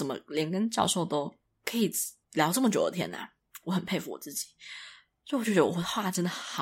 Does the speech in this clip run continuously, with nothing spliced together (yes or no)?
yes